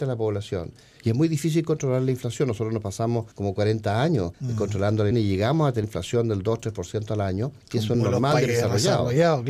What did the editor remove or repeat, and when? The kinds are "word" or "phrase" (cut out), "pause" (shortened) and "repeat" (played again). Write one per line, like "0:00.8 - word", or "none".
0:03.3 - pause
0:04.3 - pause
0:05.1 - word
0:05.8 - word
0:07.6 - pause
0:07.9 - word
0:08.5 - word